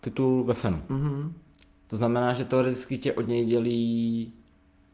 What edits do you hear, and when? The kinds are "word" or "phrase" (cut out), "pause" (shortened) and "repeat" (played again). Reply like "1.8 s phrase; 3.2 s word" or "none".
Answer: none